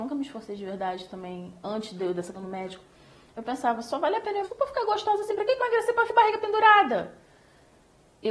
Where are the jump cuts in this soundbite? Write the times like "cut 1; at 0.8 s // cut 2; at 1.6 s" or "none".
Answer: cut 1; at 2.3 s // cut 2; at 4.4 s // cut 3; at 5.6 s // cut 4; at 6.1 s